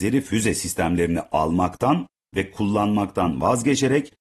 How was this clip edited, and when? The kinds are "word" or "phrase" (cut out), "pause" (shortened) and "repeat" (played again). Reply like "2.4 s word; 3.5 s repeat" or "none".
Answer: none